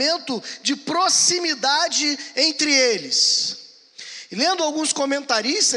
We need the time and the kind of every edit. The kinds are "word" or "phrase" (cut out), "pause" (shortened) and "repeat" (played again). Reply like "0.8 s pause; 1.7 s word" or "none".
none